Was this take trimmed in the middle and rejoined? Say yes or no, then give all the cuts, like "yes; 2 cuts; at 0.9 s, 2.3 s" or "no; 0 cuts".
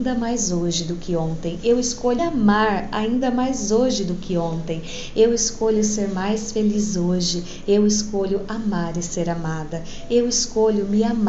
yes; 1 cut; at 2.2 s